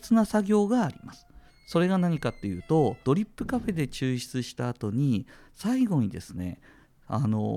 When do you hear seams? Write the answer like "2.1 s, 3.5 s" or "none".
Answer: 1.5 s, 3.0 s